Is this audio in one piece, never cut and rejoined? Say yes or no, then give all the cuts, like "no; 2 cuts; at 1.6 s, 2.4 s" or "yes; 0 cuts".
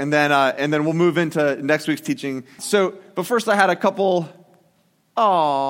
no; 1 cut; at 2.6 s